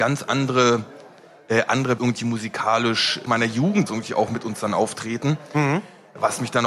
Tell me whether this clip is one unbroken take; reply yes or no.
no